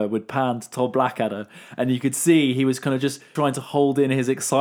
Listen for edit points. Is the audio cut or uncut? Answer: cut